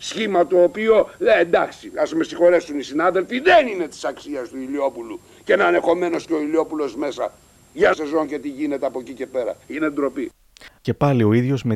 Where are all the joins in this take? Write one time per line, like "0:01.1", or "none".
0:07.9